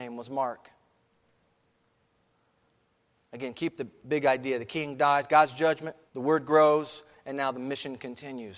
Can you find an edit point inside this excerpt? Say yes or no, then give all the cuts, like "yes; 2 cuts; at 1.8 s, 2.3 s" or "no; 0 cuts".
yes; 1 cut; at 6.1 s